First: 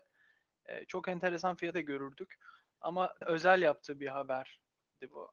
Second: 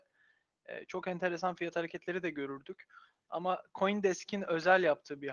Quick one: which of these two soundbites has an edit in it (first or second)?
first